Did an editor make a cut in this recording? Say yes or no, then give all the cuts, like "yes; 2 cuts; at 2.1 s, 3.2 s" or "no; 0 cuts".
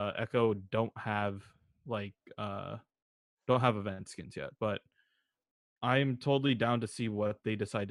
no; 0 cuts